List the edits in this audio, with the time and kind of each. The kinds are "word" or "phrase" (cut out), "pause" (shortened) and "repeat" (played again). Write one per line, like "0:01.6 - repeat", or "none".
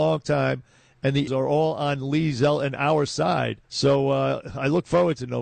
0:01.3 - word
0:03.6 - pause